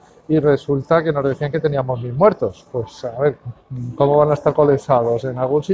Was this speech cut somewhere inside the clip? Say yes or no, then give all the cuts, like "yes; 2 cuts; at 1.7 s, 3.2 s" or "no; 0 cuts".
no; 0 cuts